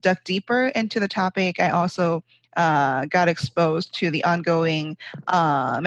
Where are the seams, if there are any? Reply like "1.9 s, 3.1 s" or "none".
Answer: none